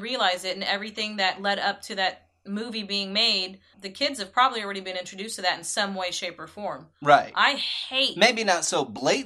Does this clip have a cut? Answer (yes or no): yes